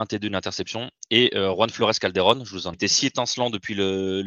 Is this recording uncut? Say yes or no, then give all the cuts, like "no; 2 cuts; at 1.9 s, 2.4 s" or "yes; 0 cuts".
no; 1 cut; at 2.7 s